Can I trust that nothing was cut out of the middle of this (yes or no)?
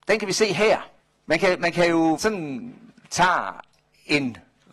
no